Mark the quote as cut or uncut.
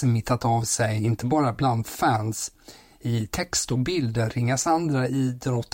uncut